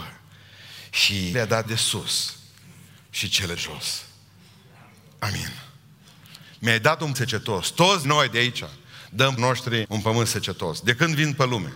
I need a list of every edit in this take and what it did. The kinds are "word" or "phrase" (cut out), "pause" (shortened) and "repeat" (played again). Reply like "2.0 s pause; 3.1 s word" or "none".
1.3 s word; 1.6 s word; 3.6 s word; 7.1 s word; 8.0 s word; 9.4 s word; 9.8 s word